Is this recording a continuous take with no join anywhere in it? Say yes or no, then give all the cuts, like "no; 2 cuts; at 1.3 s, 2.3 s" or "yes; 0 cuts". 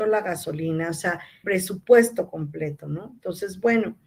no; 1 cut; at 1.4 s